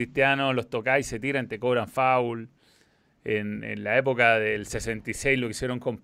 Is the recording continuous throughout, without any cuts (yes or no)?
yes